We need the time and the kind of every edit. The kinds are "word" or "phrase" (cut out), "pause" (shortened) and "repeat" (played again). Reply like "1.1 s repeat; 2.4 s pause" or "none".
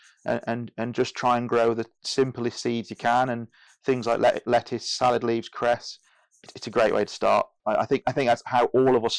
none